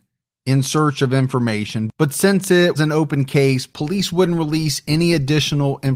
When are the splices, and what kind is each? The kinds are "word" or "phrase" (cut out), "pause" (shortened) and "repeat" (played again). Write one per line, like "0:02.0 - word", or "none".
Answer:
0:02.8 - word